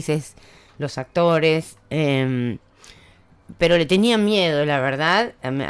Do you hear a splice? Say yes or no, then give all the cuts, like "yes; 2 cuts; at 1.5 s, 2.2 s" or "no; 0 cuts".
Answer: no; 0 cuts